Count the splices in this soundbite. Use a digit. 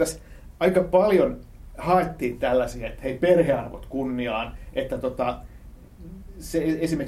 0